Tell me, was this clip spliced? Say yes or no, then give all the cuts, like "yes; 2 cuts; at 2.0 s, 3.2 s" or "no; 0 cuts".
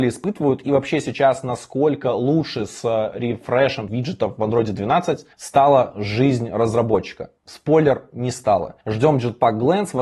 yes; 4 cuts; at 3.9 s, 5.3 s, 7.4 s, 8.8 s